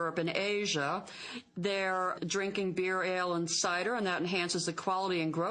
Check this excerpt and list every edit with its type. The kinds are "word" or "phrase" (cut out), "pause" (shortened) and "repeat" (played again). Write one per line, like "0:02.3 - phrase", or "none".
0:02.2 - word